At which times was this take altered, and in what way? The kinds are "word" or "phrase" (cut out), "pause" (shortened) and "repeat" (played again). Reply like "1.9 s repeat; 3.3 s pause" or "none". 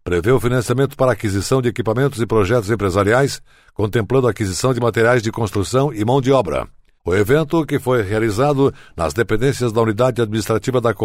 none